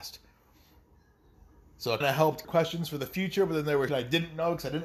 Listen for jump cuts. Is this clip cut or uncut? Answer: cut